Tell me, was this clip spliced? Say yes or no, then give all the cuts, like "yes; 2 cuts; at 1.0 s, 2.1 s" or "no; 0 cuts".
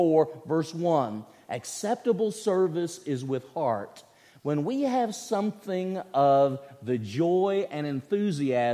no; 0 cuts